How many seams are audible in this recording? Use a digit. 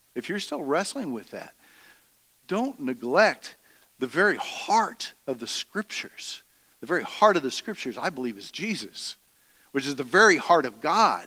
0